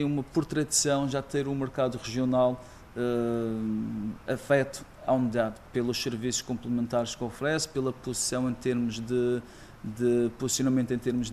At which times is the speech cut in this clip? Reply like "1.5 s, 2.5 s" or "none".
none